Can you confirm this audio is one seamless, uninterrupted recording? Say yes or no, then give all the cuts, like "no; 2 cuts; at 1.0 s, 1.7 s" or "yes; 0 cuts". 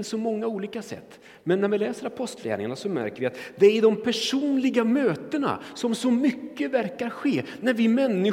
yes; 0 cuts